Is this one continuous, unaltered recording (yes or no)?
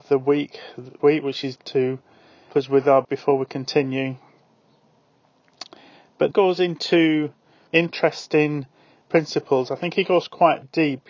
no